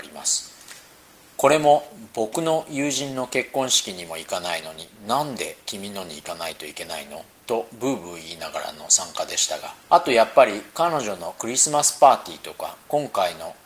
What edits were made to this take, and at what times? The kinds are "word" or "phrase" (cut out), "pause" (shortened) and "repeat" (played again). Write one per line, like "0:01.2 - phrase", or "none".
0:09.8 - pause